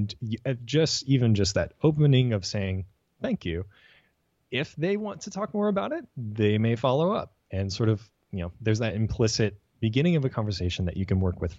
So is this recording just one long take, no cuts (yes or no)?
yes